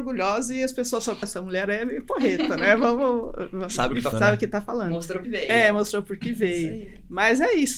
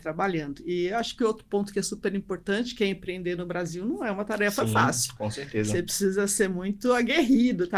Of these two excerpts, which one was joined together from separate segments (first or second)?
first